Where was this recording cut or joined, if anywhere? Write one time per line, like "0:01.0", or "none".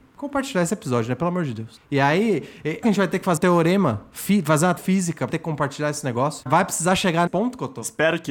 0:02.8
0:03.4
0:04.8
0:05.3
0:06.5
0:07.3